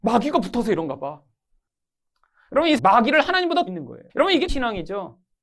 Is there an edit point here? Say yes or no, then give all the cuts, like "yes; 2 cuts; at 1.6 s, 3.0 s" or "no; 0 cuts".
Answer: yes; 4 cuts; at 2.8 s, 3.7 s, 4.1 s, 4.5 s